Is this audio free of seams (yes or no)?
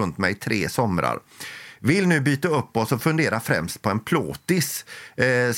yes